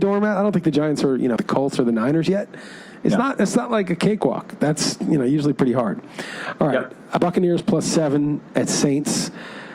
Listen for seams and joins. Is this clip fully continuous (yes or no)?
no